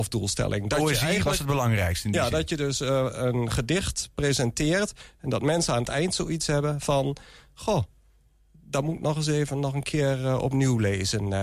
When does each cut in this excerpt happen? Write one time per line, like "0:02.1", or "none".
none